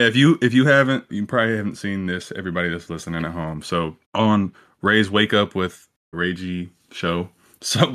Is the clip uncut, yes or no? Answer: no